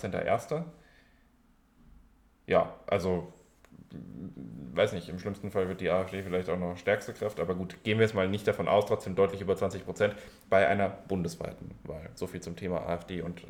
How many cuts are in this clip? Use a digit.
0